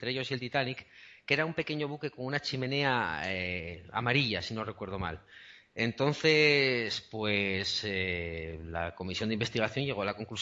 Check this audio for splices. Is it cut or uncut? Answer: uncut